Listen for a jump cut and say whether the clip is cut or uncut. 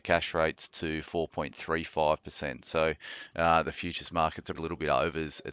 cut